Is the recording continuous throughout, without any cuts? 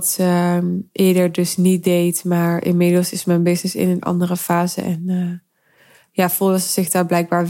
yes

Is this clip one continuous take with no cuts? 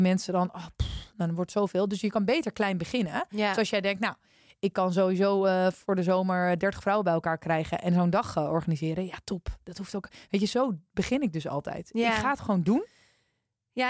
yes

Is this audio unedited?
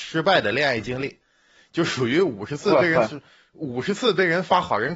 yes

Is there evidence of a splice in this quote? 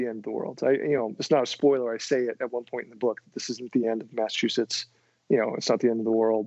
no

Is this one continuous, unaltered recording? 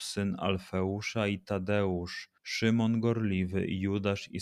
no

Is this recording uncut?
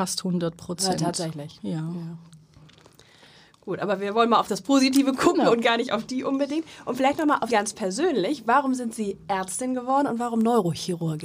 no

